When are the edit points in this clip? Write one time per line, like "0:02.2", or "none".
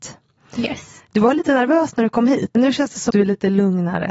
0:02.5
0:03.1